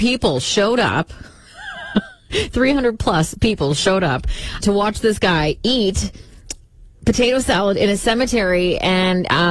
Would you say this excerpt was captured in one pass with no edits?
no; 1 cut; at 4.6 s

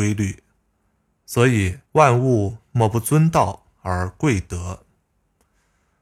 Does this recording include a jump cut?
yes; 1 cut; at 1.9 s

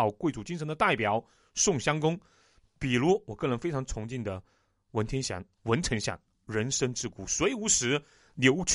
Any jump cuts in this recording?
no; 0 cuts

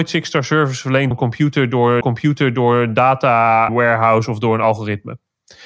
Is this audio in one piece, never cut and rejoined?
no; 3 cuts; at 1.1 s, 2.0 s, 3.7 s

